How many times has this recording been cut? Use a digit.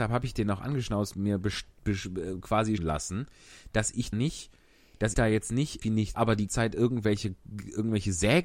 7